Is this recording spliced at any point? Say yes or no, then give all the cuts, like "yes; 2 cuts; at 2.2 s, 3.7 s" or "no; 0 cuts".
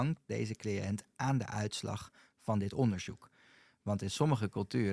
no; 0 cuts